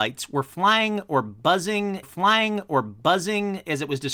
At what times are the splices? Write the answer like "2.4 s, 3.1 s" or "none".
2.0 s